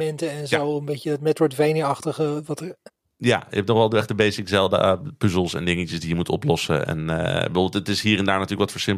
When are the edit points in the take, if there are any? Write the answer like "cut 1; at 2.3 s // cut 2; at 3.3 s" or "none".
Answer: cut 1; at 2.9 s

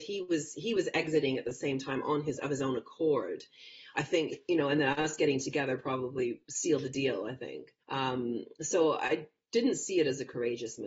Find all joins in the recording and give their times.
cut 1; at 7.8 s

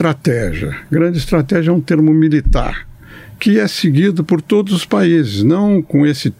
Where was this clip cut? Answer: none

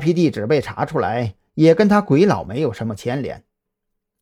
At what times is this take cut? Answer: none

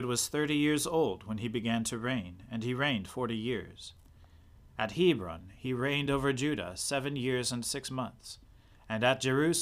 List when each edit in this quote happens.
none

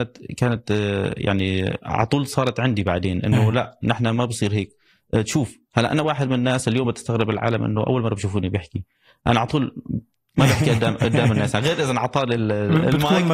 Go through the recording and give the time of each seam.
none

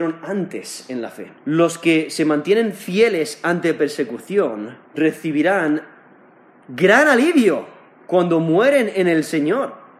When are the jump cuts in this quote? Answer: cut 1; at 1.4 s // cut 2; at 4.8 s

